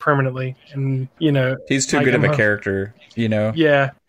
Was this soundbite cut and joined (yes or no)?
yes